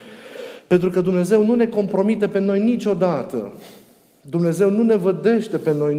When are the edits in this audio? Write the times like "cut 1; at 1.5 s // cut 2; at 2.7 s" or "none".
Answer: none